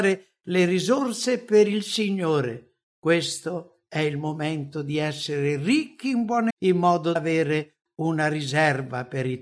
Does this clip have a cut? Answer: yes; 3 cuts; at 2.9 s, 6.5 s, 7.2 s

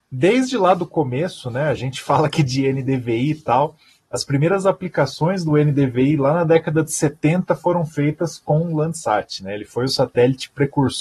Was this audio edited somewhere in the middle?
no; 0 cuts

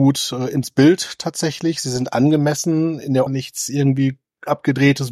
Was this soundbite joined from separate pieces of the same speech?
yes; 1 cut; at 3.3 s

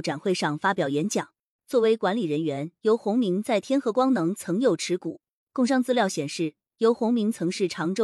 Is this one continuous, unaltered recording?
yes; 0 cuts

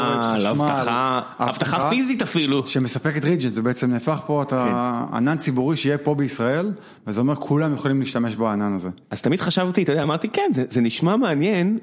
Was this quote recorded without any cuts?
yes; 0 cuts

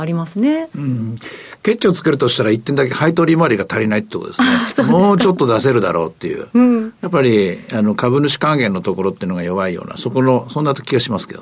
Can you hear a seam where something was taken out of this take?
no; 0 cuts

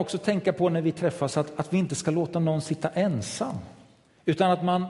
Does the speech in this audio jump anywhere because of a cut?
no; 0 cuts

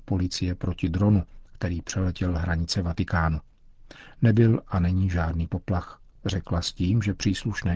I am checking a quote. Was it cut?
no; 0 cuts

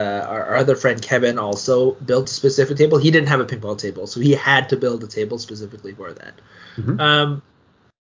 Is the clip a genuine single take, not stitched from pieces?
yes; 0 cuts

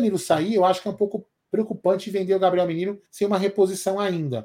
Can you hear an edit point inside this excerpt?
yes; 2 cuts; at 1.4 s, 3.1 s

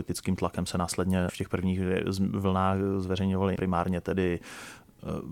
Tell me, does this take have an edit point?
yes; 2 cuts; at 1.3 s, 3.5 s

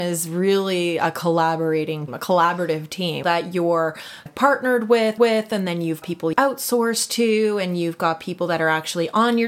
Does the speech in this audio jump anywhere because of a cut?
yes; 6 cuts; at 2.1 s, 3.2 s, 4.3 s, 5.2 s, 6.0 s, 6.3 s

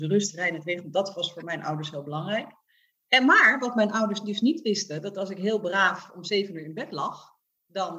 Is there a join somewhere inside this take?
no; 0 cuts

